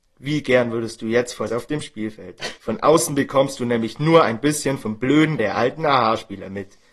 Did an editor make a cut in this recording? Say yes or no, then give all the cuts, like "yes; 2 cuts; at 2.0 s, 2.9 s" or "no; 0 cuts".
yes; 3 cuts; at 1.5 s, 2.6 s, 5.4 s